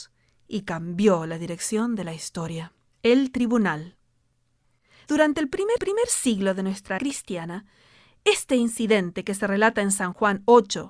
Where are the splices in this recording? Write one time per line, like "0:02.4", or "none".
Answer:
0:02.8
0:05.8
0:07.0